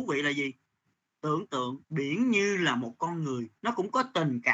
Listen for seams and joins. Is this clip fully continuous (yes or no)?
no